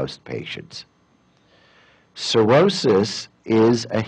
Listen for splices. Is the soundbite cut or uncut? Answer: uncut